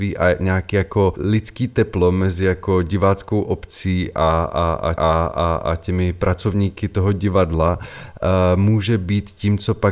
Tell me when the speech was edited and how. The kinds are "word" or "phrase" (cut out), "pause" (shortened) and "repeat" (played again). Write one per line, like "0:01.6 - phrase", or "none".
0:01.1 - word
0:05.0 - repeat